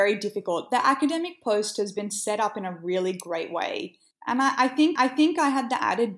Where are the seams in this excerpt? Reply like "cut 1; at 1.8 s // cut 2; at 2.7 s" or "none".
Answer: cut 1; at 5.0 s